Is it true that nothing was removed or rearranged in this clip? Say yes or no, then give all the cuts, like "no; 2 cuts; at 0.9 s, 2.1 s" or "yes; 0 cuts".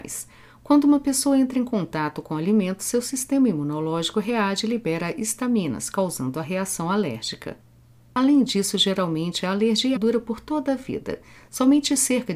no; 1 cut; at 10.0 s